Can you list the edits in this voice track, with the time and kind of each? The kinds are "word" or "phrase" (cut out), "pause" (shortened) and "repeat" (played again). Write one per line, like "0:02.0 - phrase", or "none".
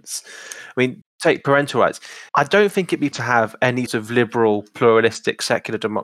0:01.0 - word
0:02.3 - pause
0:03.1 - word
0:03.9 - word